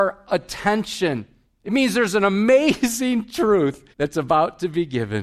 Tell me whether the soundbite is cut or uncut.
cut